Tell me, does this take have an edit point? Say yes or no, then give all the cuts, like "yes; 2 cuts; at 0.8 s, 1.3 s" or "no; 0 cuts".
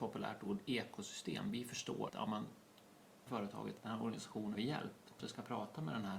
yes; 5 cuts; at 2.1 s, 3.3 s, 3.8 s, 4.5 s, 5.2 s